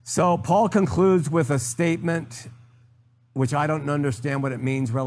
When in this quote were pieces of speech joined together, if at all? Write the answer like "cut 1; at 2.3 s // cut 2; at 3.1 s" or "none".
none